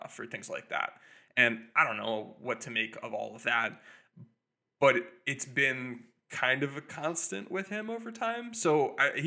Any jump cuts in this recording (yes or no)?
no